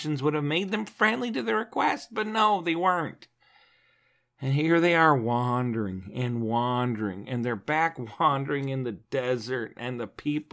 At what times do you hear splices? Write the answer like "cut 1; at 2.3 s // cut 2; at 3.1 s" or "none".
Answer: none